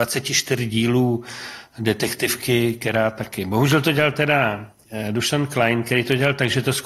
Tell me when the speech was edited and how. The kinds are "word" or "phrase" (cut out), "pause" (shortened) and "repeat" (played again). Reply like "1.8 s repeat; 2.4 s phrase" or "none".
none